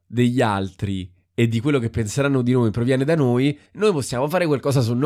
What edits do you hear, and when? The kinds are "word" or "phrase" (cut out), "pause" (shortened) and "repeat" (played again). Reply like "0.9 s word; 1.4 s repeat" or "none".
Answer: 3.7 s pause